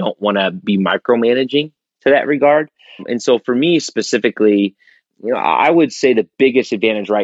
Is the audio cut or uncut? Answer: uncut